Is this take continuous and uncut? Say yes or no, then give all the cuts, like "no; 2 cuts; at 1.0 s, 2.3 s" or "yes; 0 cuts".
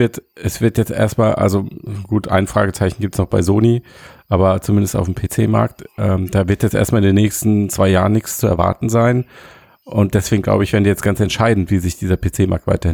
yes; 0 cuts